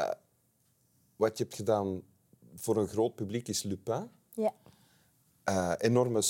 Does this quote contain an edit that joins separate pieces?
no; 0 cuts

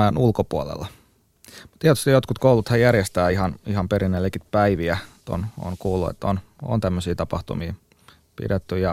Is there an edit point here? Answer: no; 0 cuts

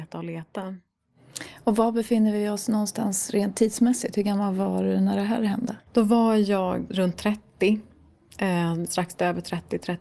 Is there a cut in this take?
yes; 3 cuts; at 5.9 s, 6.9 s, 8.9 s

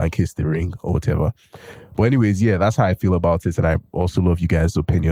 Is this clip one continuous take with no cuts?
yes; 0 cuts

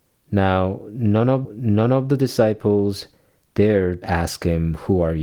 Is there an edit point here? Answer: yes; 2 cuts; at 1.4 s, 4.0 s

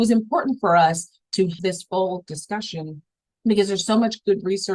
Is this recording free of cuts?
no; 1 cut; at 1.6 s

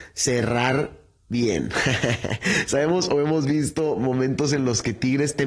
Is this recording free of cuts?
yes; 0 cuts

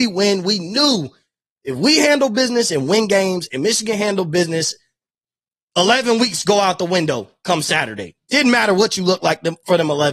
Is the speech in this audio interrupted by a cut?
no; 0 cuts

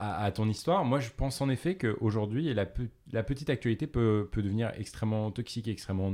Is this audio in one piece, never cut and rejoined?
no; 1 cut; at 3.0 s

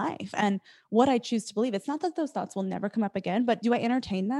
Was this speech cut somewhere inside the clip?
no; 0 cuts

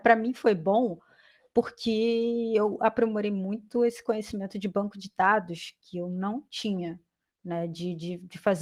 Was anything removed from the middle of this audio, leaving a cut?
no; 0 cuts

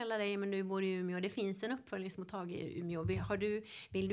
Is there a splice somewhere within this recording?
no; 0 cuts

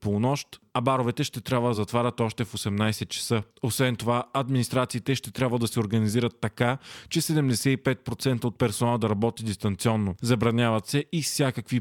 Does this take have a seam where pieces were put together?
no; 0 cuts

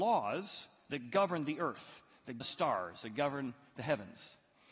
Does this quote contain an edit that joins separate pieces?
yes; 1 cut; at 2.4 s

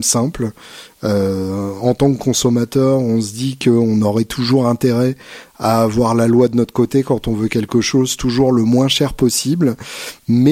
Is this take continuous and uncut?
yes; 0 cuts

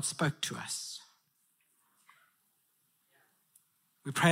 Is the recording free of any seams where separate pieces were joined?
yes; 0 cuts

